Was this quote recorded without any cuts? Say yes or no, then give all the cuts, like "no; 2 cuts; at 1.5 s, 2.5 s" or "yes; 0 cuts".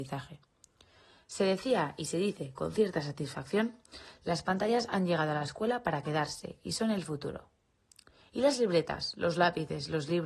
yes; 0 cuts